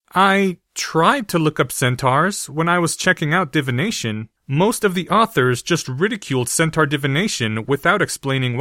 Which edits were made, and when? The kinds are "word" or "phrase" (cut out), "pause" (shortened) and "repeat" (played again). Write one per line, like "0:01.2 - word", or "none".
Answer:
0:04.4 - pause